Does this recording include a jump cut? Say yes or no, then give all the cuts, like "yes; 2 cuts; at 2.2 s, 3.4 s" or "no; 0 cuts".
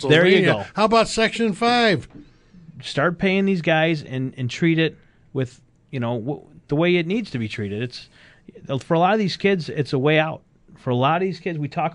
no; 0 cuts